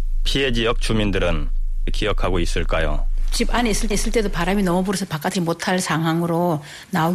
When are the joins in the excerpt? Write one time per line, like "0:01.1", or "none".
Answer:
0:01.9
0:03.9
0:05.3